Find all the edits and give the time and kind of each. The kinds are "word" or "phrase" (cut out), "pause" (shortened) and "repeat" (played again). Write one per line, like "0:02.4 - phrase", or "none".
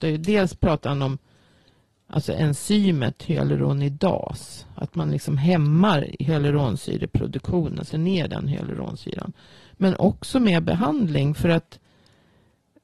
0:07.9 - phrase